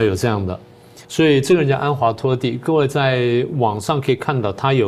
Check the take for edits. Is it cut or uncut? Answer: cut